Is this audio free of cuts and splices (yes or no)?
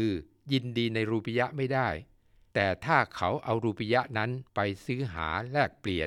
no